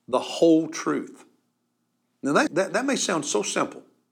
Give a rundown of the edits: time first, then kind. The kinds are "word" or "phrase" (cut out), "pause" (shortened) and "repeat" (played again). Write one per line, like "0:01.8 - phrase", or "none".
0:02.5 - word